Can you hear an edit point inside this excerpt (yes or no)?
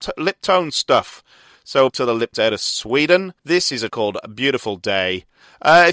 yes